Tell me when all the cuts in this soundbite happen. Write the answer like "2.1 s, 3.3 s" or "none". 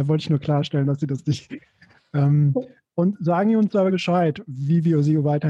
3.9 s